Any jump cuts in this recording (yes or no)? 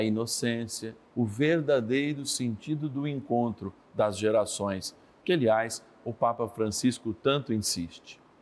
yes